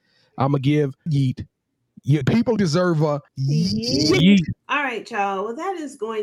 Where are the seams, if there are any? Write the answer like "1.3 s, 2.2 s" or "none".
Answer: 1.1 s, 2.2 s, 2.6 s, 3.3 s, 4.6 s